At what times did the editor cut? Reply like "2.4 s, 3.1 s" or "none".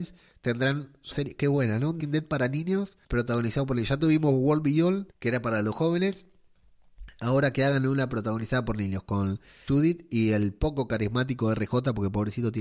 1.1 s, 2.0 s, 3.0 s, 5.1 s, 9.7 s